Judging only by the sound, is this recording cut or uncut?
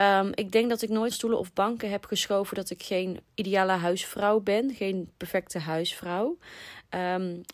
cut